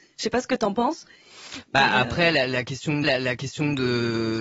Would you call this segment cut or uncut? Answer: cut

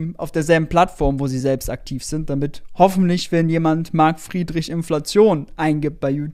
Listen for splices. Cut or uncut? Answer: uncut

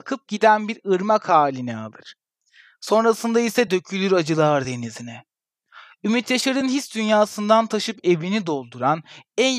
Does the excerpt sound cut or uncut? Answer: uncut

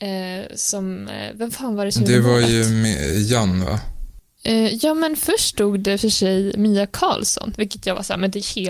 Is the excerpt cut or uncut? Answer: uncut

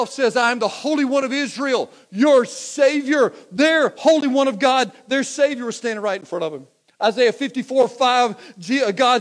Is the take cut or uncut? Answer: cut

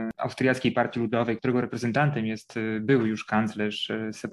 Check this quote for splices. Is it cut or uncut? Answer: cut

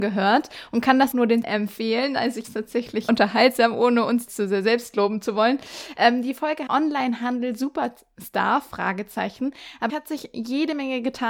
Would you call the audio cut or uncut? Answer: cut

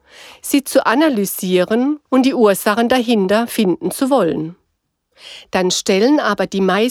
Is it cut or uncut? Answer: cut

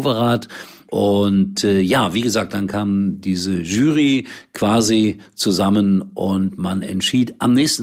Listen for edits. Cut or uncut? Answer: uncut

